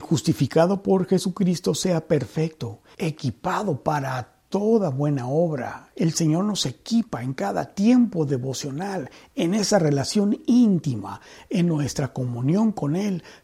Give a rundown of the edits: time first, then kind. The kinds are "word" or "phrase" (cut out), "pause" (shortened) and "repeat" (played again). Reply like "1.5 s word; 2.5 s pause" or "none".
none